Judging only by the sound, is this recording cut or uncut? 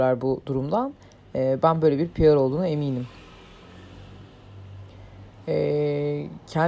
uncut